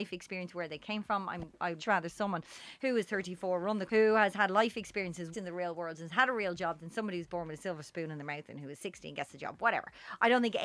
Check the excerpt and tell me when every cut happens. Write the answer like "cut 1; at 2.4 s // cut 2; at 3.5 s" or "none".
cut 1; at 1.8 s // cut 2; at 3.9 s // cut 3; at 5.3 s